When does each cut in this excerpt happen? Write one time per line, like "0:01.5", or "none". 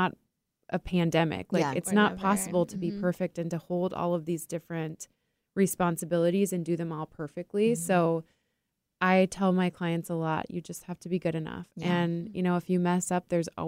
0:11.7